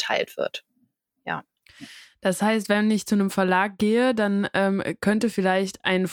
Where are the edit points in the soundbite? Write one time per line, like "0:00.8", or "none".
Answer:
none